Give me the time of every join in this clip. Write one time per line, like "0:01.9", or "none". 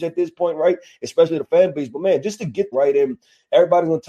0:02.7